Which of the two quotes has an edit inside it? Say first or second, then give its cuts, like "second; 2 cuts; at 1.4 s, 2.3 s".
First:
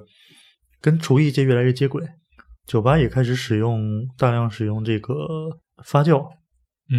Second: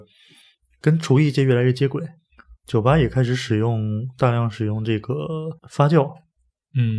second; 1 cut; at 5.6 s